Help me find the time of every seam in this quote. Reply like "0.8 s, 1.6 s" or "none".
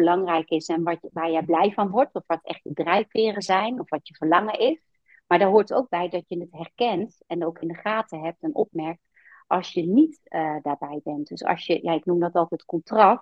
none